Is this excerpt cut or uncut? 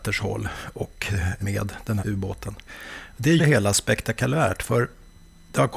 cut